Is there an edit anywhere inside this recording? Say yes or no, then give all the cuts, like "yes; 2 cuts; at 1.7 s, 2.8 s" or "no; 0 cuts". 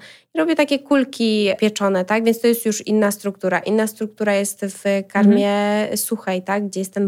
no; 0 cuts